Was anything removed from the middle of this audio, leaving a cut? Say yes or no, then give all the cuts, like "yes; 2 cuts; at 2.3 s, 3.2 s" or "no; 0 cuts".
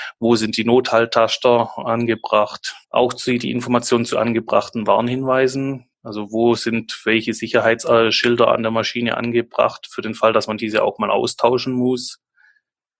yes; 2 cuts; at 2.8 s, 5.9 s